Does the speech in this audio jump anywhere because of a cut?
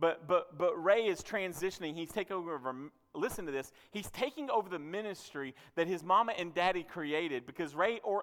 no; 0 cuts

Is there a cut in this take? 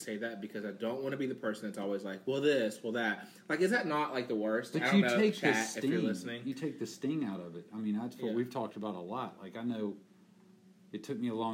no; 0 cuts

